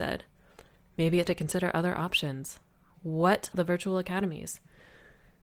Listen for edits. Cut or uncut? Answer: cut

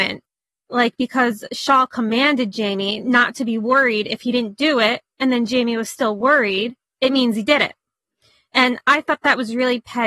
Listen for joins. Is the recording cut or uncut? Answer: uncut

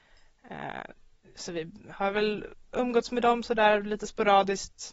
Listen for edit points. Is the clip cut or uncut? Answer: uncut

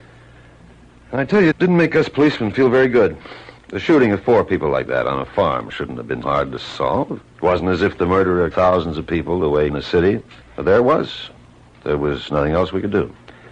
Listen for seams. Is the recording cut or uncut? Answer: cut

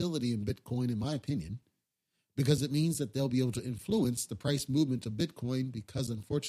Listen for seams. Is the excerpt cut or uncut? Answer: uncut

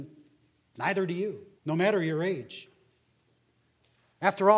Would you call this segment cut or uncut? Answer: cut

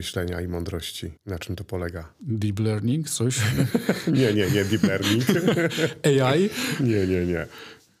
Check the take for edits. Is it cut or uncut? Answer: cut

